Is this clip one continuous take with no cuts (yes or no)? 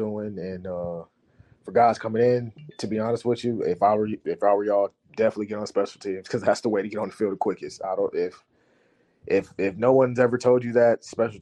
yes